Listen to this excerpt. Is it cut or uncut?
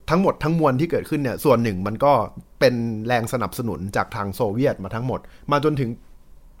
cut